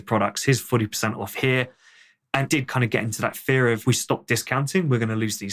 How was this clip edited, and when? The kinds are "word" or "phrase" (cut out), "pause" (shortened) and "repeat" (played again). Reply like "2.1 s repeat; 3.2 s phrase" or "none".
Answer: 2.5 s word; 3.8 s word